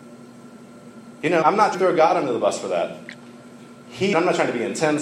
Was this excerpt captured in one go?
no; 3 cuts; at 1.4 s, 1.7 s, 4.1 s

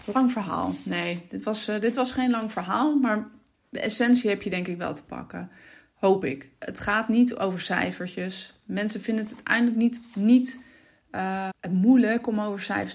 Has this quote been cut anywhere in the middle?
yes; 1 cut; at 11.5 s

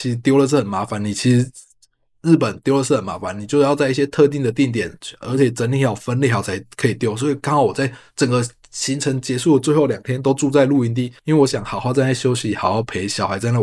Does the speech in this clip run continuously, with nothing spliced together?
no; 1 cut; at 11.2 s

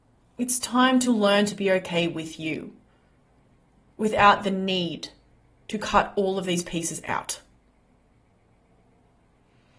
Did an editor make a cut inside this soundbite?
no; 0 cuts

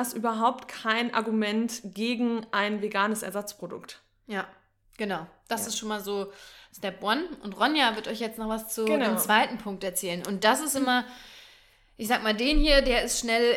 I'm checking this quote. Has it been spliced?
no; 0 cuts

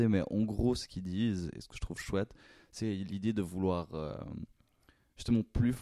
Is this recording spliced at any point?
no; 0 cuts

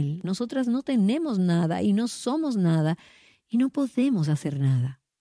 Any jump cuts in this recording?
no; 0 cuts

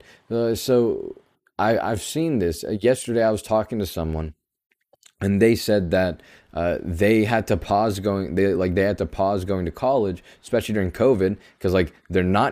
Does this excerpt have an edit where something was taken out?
no; 0 cuts

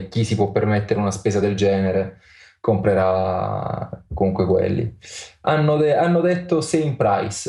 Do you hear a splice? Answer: no; 0 cuts

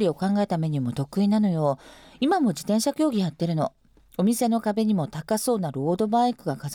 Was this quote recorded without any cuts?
yes; 0 cuts

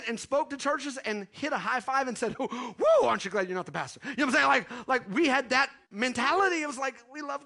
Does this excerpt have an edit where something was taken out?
yes; 1 cut; at 5.8 s

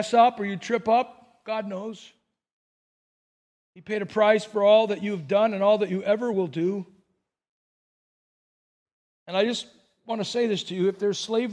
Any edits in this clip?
no; 0 cuts

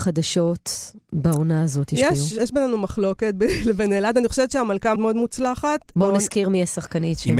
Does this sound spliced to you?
yes; 1 cut; at 5.0 s

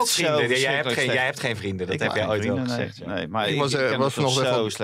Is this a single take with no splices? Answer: yes; 0 cuts

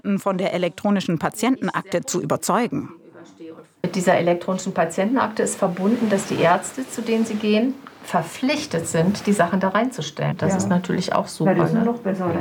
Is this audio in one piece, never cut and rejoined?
yes; 0 cuts

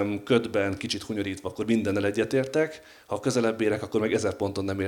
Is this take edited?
no; 0 cuts

